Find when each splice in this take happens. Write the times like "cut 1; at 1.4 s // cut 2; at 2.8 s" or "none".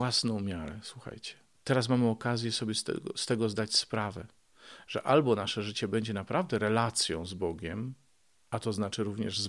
none